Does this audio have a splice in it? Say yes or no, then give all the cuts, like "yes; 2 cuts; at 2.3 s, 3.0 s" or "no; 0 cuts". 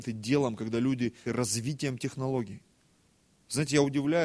yes; 1 cut; at 1.3 s